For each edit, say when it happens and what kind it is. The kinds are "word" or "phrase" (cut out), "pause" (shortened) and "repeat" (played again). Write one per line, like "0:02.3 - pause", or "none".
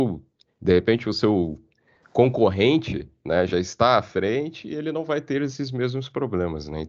none